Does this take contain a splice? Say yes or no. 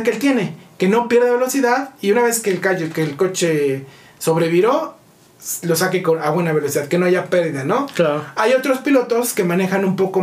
no